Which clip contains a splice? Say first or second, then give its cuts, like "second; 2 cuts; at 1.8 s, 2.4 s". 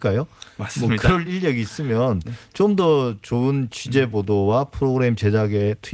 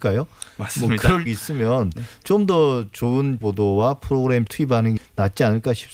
second; 4 cuts; at 1.3 s, 3.4 s, 4.5 s, 5.0 s